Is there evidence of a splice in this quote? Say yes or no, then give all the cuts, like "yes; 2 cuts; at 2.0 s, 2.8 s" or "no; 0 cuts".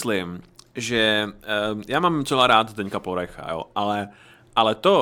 no; 0 cuts